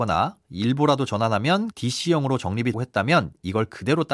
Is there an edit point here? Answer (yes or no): yes